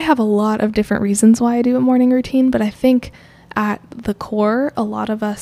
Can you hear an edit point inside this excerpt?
no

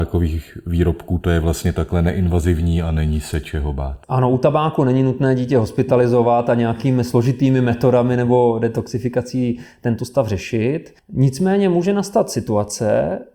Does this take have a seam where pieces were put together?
yes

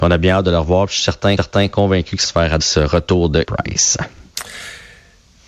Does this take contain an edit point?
yes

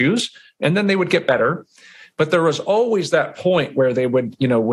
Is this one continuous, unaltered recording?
yes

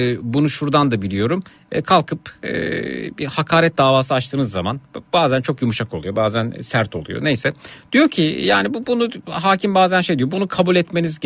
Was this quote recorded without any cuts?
yes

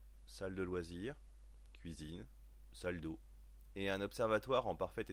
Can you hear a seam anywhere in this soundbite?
no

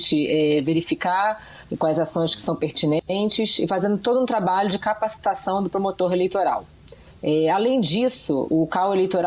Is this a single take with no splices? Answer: no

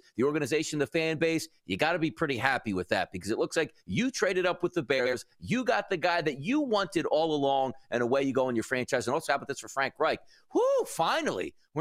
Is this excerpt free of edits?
yes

